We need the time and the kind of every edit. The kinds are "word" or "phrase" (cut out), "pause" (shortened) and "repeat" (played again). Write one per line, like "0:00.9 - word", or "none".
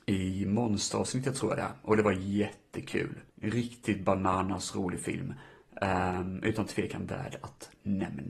0:03.3 - pause